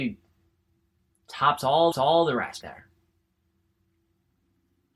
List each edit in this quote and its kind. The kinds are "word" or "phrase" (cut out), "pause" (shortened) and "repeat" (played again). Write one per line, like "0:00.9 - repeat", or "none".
0:01.1 - word
0:01.9 - repeat
0:02.6 - word